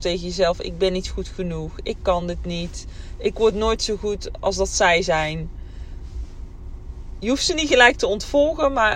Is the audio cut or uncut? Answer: uncut